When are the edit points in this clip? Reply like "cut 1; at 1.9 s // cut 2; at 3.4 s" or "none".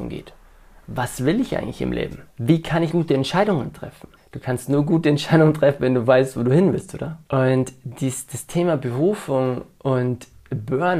cut 1; at 2.3 s // cut 2; at 2.9 s // cut 3; at 4.2 s // cut 4; at 7.2 s